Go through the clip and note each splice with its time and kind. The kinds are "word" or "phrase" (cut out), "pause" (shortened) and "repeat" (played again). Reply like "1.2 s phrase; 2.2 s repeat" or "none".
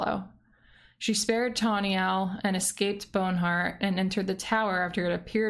none